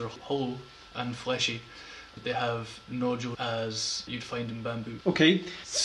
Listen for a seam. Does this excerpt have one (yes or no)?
yes